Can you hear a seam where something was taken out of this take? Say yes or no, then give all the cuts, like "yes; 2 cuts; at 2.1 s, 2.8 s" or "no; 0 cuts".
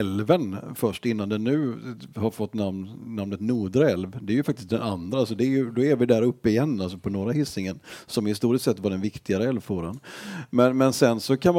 no; 0 cuts